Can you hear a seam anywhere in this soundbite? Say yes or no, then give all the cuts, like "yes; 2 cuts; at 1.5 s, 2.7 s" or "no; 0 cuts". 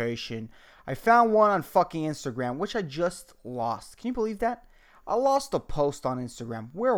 no; 0 cuts